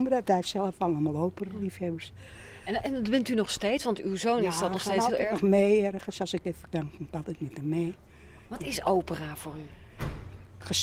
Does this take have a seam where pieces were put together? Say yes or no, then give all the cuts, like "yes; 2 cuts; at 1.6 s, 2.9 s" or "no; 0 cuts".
no; 0 cuts